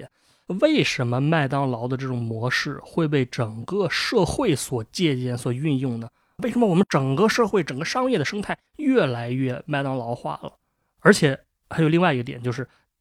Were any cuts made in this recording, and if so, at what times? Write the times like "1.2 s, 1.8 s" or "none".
8.7 s